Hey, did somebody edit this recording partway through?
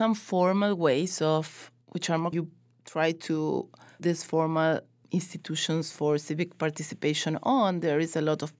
yes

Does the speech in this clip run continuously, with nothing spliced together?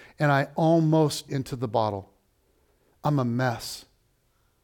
no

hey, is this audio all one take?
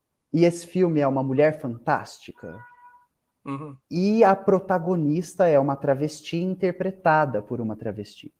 no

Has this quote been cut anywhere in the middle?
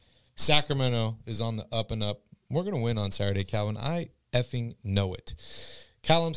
no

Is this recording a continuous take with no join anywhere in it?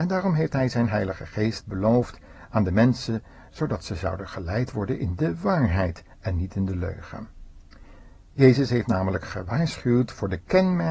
yes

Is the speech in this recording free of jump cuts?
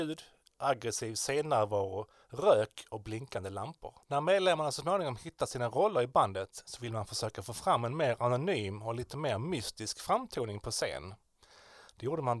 no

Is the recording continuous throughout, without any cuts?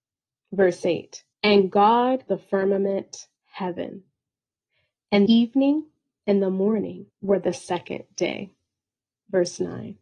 no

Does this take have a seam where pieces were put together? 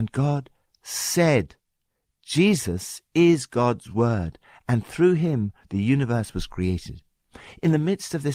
no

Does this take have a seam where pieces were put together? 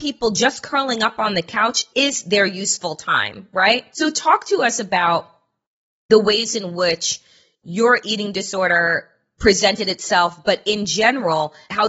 no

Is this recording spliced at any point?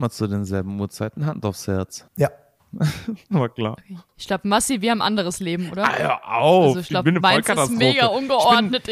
yes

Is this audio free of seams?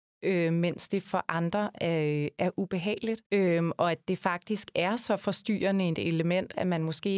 no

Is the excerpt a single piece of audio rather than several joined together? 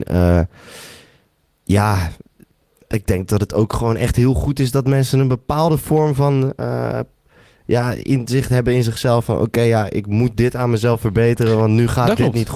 yes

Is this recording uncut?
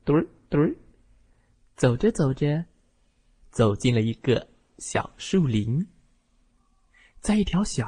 yes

